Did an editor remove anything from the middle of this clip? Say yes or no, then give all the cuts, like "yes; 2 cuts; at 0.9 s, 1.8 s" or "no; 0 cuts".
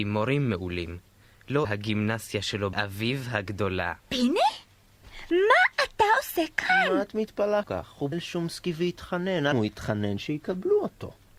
yes; 6 cuts; at 1.6 s, 2.7 s, 4.0 s, 7.6 s, 8.1 s, 9.5 s